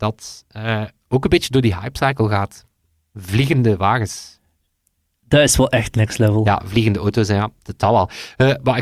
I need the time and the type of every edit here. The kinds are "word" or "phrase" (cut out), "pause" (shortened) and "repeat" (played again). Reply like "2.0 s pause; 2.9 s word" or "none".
none